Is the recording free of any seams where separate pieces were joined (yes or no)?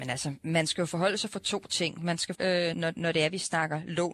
no